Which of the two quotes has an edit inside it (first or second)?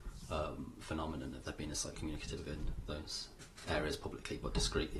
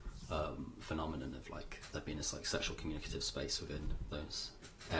first